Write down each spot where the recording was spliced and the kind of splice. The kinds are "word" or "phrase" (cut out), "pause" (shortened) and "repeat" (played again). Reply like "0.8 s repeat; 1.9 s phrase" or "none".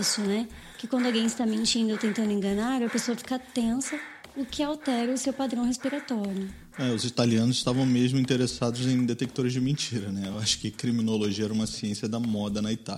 none